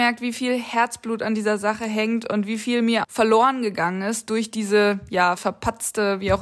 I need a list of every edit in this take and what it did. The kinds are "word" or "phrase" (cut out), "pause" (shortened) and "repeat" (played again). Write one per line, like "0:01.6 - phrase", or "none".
0:03.0 - word
0:05.4 - word